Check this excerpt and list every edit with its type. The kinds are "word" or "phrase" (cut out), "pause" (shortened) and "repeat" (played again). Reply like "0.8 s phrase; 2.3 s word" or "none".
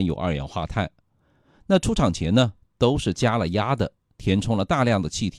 none